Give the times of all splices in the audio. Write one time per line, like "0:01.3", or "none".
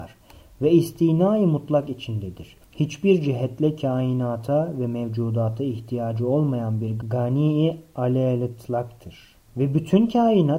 0:09.5